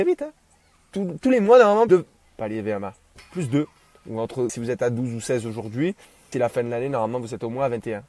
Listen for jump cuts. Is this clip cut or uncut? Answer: cut